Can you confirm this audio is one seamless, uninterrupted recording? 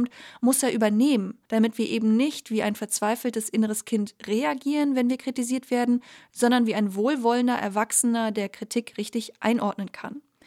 no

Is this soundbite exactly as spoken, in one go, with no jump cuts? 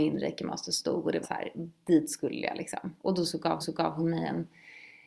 no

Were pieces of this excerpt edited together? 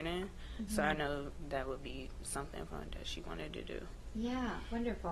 no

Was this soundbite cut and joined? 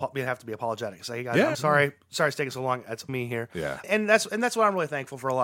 yes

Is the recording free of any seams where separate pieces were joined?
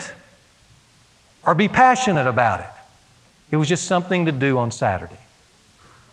yes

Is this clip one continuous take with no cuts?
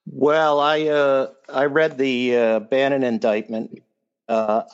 yes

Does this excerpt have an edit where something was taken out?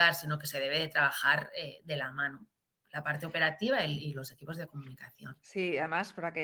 no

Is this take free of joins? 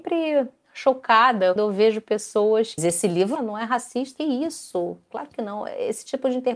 no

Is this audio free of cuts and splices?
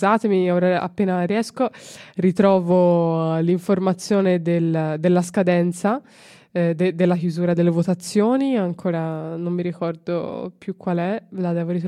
yes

